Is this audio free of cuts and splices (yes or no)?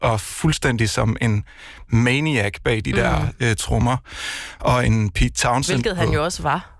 yes